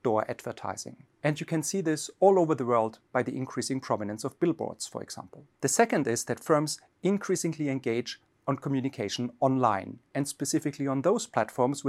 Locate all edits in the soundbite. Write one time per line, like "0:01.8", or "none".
0:01.1
0:05.5